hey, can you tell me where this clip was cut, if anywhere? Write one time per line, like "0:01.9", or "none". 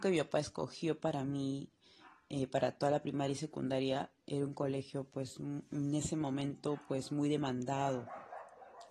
none